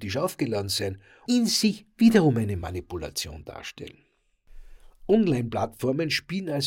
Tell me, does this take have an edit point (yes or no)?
yes